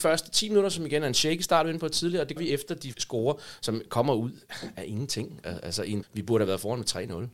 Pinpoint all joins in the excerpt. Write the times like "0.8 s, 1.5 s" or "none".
2.4 s, 2.9 s, 6.0 s

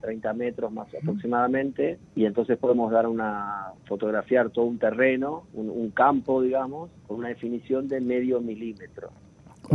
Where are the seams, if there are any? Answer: 2.1 s, 3.8 s, 5.5 s, 7.0 s

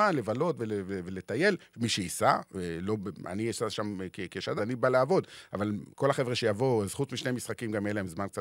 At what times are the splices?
4.6 s, 5.9 s

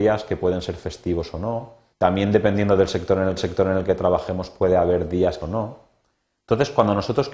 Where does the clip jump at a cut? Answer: 1.9 s, 3.4 s, 5.4 s

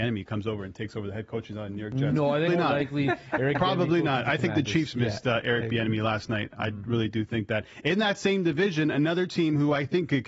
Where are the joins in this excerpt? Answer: 2.5 s

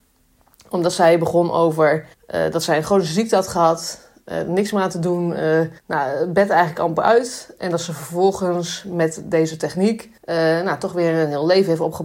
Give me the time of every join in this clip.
2.1 s, 5.8 s, 10.2 s

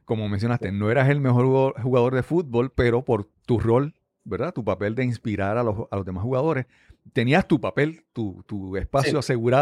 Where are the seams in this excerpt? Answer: 3.3 s

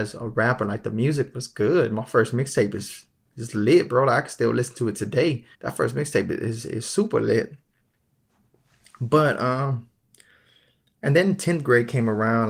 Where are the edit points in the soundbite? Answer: 5.5 s

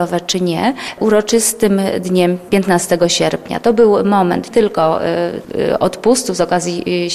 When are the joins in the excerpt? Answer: 4.5 s

